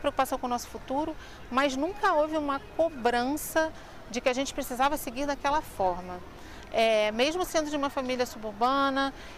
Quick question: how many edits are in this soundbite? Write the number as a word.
zero